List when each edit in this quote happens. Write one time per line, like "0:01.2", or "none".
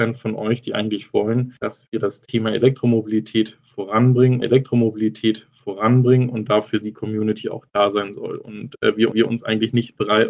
0:01.6
0:04.4
0:09.1